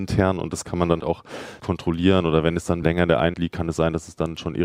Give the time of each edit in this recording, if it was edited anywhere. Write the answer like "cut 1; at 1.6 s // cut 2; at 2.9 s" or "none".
cut 1; at 1.0 s // cut 2; at 1.6 s // cut 3; at 2.8 s // cut 4; at 3.3 s

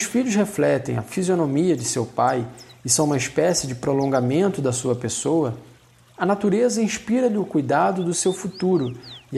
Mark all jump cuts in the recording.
none

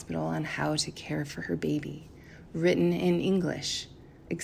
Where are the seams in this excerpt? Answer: none

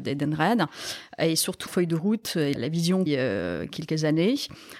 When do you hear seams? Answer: cut 1; at 1.7 s // cut 2; at 2.5 s // cut 3; at 3.1 s

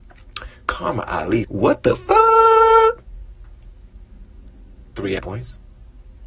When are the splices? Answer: cut 1; at 1.4 s // cut 2; at 5.2 s

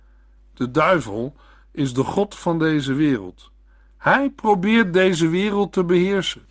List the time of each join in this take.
none

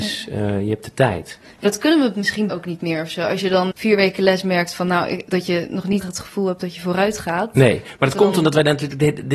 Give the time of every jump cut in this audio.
cut 1; at 1.6 s // cut 2; at 2.5 s // cut 3; at 3.7 s // cut 4; at 5.3 s // cut 5; at 6.0 s

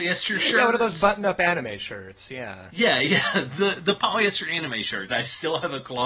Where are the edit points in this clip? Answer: cut 1; at 5.1 s

